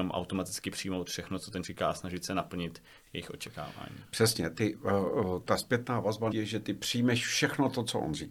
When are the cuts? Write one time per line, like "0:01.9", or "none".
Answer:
0:01.6
0:05.4
0:06.3